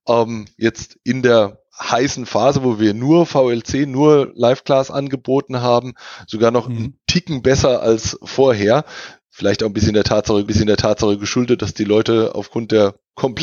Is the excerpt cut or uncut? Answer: cut